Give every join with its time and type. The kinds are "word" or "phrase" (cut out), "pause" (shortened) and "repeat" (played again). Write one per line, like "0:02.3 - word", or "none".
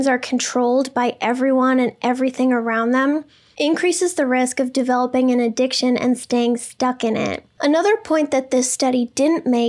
none